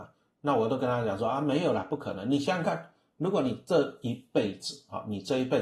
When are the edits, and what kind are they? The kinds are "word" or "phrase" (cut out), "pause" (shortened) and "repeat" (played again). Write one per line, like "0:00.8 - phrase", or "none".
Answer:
none